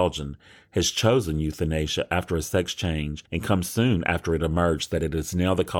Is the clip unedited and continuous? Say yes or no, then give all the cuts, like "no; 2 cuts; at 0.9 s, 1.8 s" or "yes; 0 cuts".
yes; 0 cuts